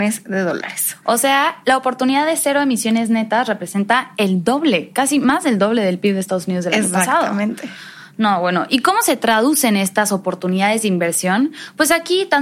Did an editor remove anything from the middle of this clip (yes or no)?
no